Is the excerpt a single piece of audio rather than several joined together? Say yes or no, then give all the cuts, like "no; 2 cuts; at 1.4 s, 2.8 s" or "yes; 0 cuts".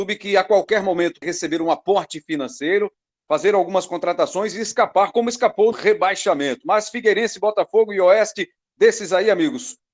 no; 2 cuts; at 1.2 s, 5.7 s